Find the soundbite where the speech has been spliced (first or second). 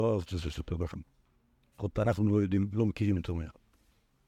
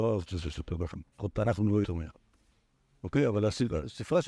second